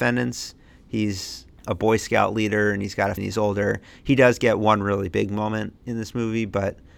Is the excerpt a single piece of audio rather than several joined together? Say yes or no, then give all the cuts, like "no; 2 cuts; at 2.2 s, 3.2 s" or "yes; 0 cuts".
no; 1 cut; at 3.2 s